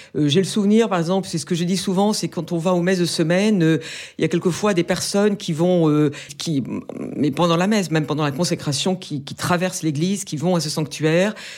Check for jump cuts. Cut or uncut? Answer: cut